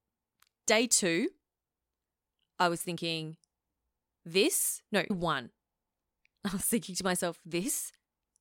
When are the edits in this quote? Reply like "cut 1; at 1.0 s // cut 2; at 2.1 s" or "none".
cut 1; at 5.1 s